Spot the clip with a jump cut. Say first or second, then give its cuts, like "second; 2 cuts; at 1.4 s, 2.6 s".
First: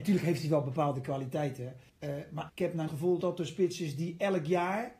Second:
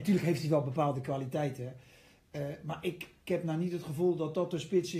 first; 4 cuts; at 1.9 s, 2.5 s, 2.9 s, 3.2 s